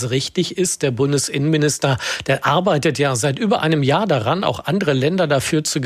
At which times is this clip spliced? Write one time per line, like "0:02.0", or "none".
none

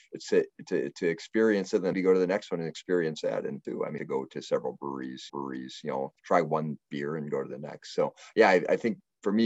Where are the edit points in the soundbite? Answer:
0:01.9
0:03.6
0:04.0
0:05.3
0:06.2

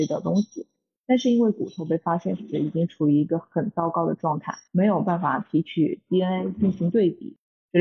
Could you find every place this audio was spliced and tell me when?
0:04.7

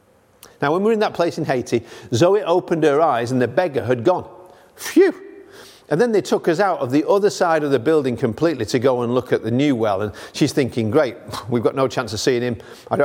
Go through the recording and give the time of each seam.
none

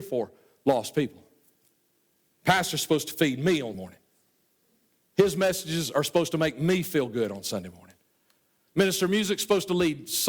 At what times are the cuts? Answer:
0:03.7

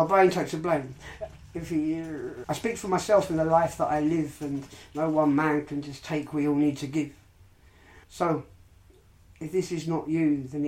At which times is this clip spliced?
0:02.4
0:08.0

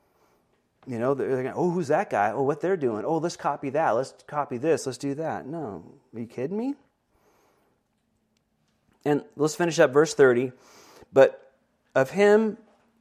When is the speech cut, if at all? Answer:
none

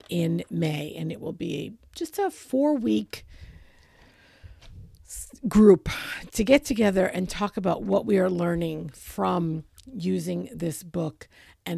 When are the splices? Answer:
none

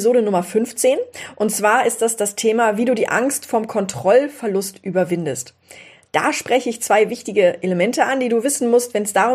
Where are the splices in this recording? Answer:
none

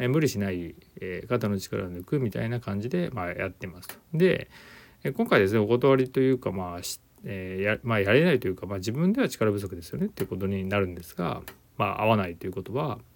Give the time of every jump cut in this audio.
0:04.0

